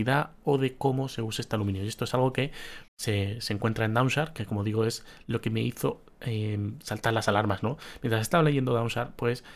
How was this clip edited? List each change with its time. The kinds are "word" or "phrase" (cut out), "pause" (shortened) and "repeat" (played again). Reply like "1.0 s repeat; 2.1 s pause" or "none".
2.9 s pause